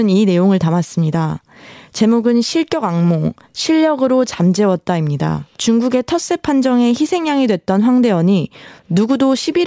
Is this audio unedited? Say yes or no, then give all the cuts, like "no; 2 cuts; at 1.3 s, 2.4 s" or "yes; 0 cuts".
no; 1 cut; at 5.5 s